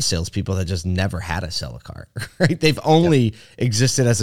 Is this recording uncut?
yes; 0 cuts

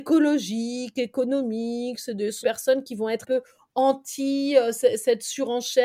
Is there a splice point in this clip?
yes; 2 cuts; at 2.4 s, 3.2 s

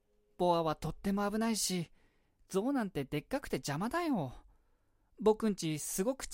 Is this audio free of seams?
yes; 0 cuts

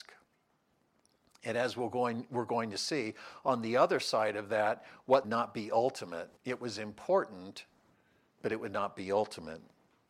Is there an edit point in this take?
yes; 2 cuts; at 5.2 s, 6.4 s

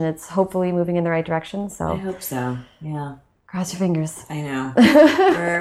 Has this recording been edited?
no; 0 cuts

